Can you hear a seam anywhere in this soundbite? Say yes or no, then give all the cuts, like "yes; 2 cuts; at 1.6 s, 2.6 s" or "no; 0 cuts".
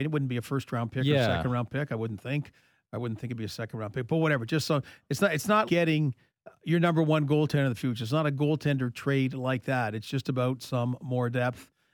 yes; 1 cut; at 5.7 s